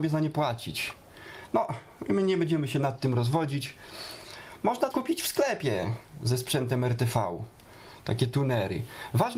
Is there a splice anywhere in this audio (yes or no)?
yes